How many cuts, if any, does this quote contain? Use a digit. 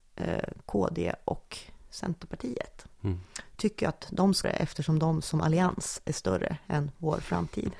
1